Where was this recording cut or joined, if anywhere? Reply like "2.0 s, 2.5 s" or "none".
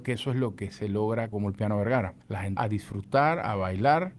1.3 s, 2.2 s, 2.6 s

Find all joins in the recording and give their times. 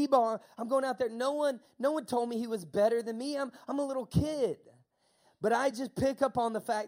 none

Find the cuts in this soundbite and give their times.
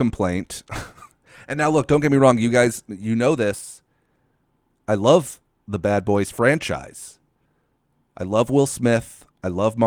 none

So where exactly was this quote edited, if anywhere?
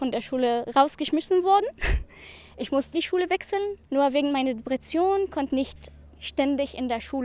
2.9 s, 3.8 s, 5.5 s, 6.0 s

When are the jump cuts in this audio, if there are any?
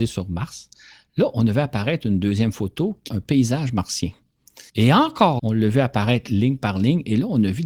3.1 s, 4.7 s, 5.4 s

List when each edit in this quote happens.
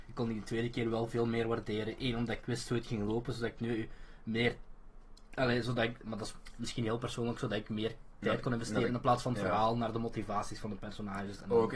none

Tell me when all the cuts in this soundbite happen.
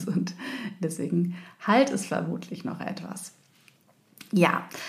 none

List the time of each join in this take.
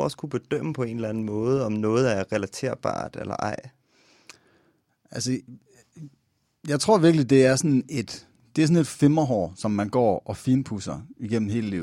none

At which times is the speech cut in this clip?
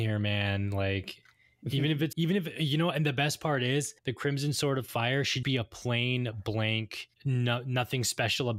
2.1 s, 4.0 s, 5.4 s, 7.1 s

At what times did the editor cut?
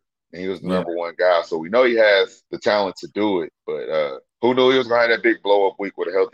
2.5 s, 4.3 s

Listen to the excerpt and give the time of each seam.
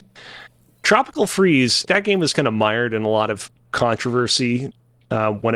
1.9 s

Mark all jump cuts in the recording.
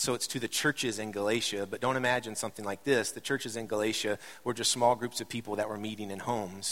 none

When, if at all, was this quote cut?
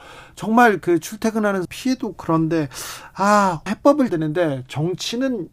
1.6 s, 2.1 s, 3.7 s, 4.1 s

